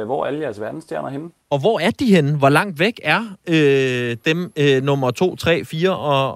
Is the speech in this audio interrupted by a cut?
yes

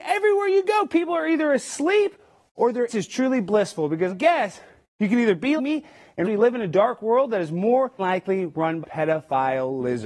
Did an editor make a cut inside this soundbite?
yes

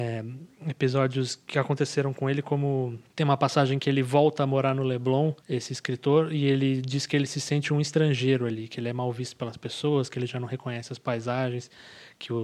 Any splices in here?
yes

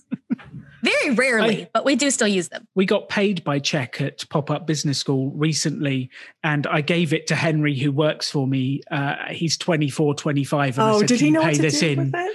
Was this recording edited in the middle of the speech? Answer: yes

